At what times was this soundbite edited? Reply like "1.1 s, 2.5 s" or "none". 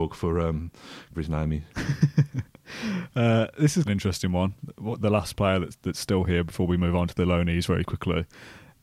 1.1 s, 3.9 s